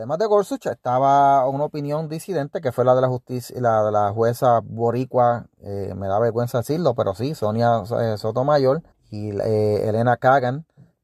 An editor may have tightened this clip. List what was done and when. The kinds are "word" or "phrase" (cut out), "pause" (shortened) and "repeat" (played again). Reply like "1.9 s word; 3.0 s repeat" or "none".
8.9 s pause